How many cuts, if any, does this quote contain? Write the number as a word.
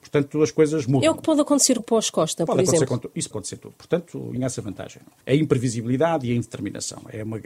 four